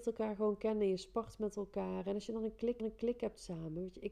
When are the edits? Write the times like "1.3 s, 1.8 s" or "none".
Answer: 2.8 s